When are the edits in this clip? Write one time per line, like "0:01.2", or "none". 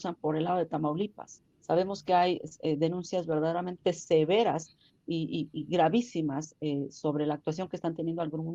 0:01.5